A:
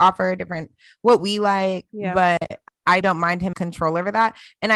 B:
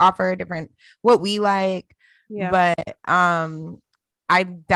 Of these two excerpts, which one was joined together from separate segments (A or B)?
A